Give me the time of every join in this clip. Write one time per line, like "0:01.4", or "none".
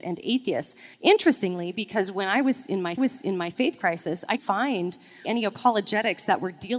0:00.9
0:03.0
0:04.4
0:05.2